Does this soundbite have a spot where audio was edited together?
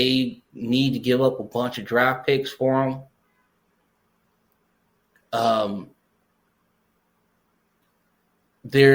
no; 0 cuts

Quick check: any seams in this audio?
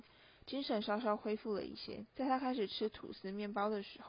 yes; 1 cut; at 2.1 s

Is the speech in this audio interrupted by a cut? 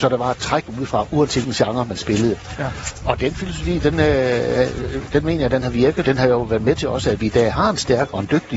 yes; 2 cuts; at 1.4 s, 6.0 s

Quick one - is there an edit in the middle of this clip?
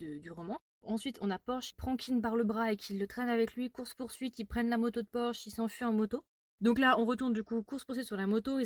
yes; 1 cut; at 1.7 s

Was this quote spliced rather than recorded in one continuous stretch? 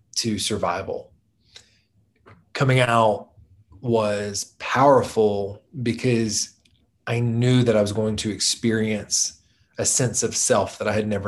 no; 0 cuts

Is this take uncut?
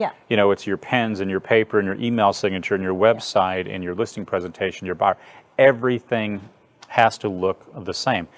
yes; 0 cuts

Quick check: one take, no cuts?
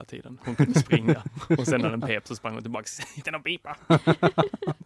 no; 1 cut; at 3.2 s

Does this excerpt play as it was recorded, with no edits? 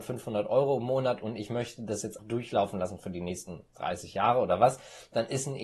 no; 1 cut; at 2.2 s

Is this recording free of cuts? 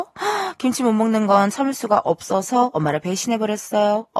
yes; 0 cuts

